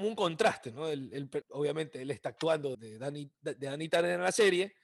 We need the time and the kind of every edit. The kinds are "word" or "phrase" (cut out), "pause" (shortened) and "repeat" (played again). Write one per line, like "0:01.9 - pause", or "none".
0:01.4 - word
0:02.7 - word